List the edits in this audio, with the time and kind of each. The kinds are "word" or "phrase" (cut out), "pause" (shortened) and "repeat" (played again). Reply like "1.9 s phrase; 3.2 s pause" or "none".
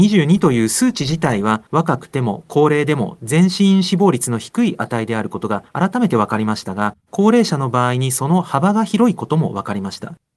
1.7 s pause; 5.7 s pause; 7.0 s pause